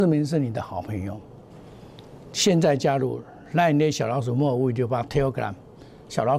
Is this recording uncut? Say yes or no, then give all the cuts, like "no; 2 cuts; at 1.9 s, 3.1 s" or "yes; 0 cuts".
yes; 0 cuts